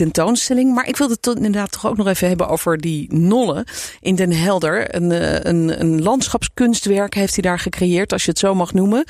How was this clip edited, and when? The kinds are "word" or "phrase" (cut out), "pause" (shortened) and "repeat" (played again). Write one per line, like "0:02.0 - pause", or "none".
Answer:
none